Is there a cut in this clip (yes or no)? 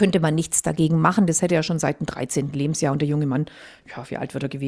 no